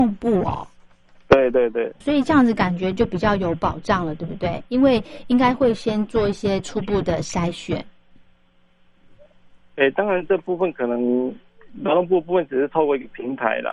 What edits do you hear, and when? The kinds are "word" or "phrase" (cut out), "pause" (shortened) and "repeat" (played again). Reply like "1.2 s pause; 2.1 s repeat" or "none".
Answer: 2.0 s word